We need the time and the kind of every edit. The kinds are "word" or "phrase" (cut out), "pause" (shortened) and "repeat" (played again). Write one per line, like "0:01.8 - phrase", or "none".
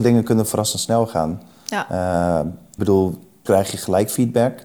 0:02.8 - word
0:03.5 - word

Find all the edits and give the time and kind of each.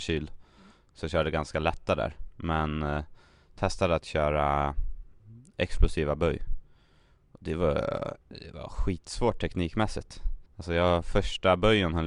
0:08.2 - pause
0:10.5 - pause

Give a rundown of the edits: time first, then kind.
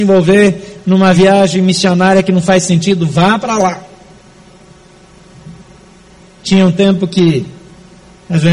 none

